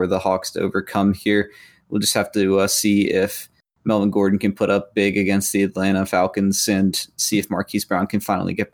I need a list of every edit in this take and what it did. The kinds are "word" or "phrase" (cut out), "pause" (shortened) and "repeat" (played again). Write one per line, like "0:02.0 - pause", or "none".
none